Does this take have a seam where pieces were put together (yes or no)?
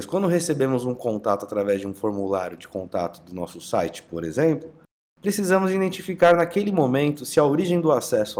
no